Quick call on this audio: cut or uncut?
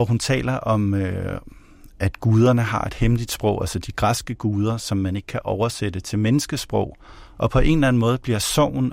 uncut